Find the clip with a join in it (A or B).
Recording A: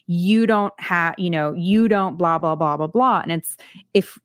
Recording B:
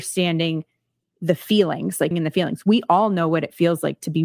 B